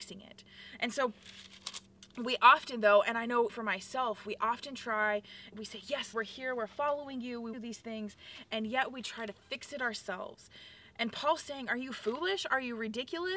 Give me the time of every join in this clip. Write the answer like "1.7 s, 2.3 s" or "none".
3.5 s, 5.5 s, 6.1 s, 7.5 s